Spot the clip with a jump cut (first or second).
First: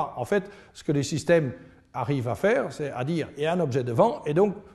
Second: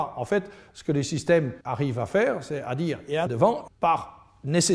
second